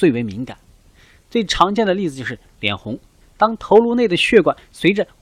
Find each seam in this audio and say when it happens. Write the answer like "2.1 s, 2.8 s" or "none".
3.2 s